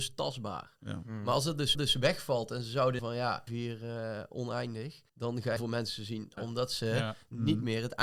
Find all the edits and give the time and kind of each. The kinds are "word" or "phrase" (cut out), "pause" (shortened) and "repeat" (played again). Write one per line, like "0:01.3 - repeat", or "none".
0:01.7 - repeat
0:03.0 - phrase
0:03.5 - phrase
0:05.1 - pause
0:05.6 - phrase
0:06.4 - word